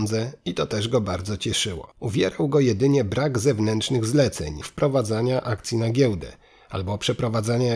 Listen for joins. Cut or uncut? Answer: cut